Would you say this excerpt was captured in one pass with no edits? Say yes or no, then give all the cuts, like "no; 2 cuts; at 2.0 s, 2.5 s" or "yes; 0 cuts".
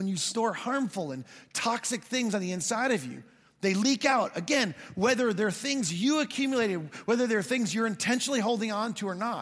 yes; 0 cuts